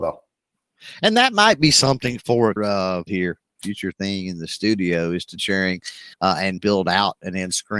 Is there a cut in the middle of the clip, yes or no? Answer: yes